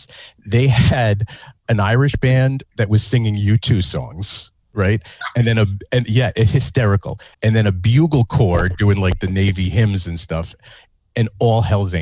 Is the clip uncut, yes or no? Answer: no